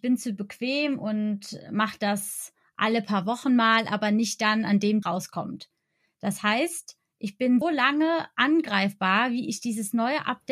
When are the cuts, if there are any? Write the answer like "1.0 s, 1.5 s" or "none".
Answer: 5.0 s, 7.6 s

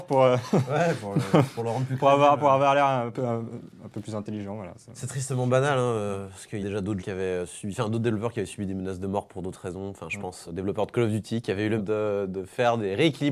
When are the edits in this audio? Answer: 6.6 s, 7.0 s, 10.5 s, 11.8 s

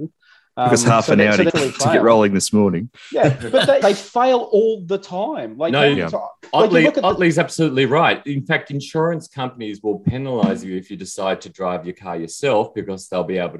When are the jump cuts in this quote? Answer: 1.5 s, 3.8 s

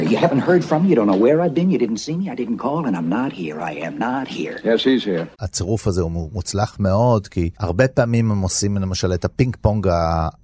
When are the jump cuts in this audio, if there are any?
5.3 s, 7.5 s

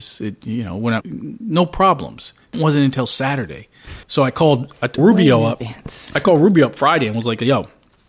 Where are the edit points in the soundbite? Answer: 1.0 s, 2.5 s, 4.0 s, 5.0 s

